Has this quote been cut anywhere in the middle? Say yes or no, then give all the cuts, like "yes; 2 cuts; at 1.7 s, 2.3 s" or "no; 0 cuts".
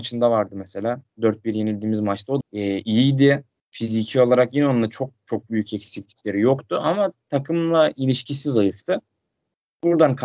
yes; 3 cuts; at 1.1 s, 2.4 s, 3.5 s